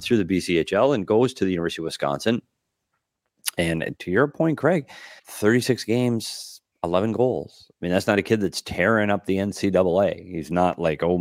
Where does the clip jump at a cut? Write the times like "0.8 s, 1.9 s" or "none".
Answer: 5.2 s, 6.7 s

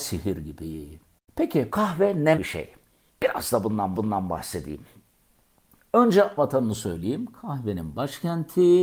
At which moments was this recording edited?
1.7 s, 2.4 s, 3.9 s, 6.4 s

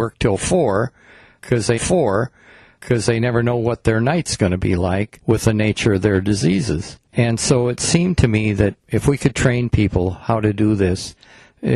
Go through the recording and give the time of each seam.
1.8 s, 7.1 s

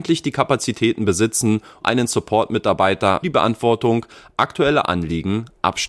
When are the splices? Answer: 1.8 s, 3.2 s

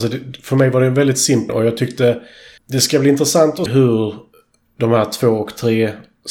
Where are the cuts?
1.5 s, 2.6 s, 3.7 s

